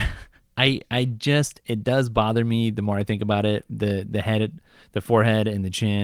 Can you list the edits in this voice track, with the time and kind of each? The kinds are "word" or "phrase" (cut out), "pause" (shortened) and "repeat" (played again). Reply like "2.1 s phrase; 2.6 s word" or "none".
none